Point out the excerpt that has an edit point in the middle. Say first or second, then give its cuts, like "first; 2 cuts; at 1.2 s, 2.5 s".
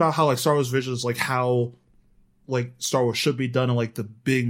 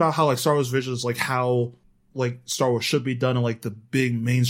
second; 1 cut; at 1.8 s